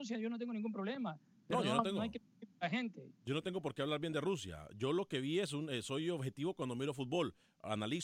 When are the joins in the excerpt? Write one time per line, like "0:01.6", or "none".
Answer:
none